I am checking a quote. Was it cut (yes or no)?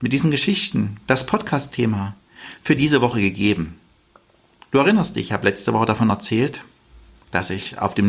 no